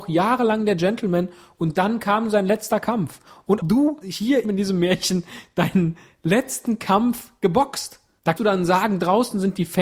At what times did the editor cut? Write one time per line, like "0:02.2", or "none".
0:03.6
0:04.0
0:04.4
0:08.4